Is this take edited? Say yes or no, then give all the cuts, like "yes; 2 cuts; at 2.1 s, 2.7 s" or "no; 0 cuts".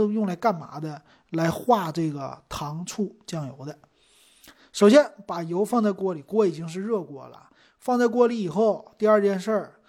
no; 0 cuts